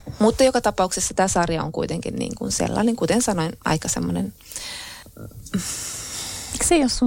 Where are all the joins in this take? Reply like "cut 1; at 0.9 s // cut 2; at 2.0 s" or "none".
none